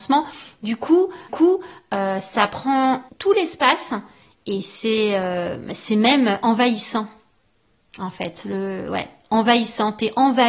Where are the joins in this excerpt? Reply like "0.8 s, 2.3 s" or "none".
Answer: 1.3 s, 3.1 s